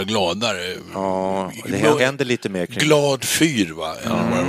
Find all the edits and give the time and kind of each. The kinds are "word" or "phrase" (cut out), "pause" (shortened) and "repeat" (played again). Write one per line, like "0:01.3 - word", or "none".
0:02.0 - word